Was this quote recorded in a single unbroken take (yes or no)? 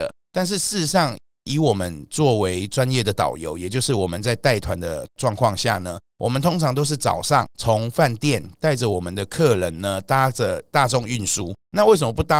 no